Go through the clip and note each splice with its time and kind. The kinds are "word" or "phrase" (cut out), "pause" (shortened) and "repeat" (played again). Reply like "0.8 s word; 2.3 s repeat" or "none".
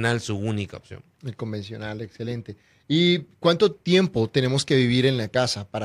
none